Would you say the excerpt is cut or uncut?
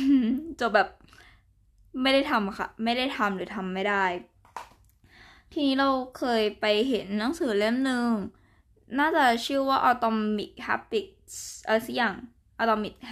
uncut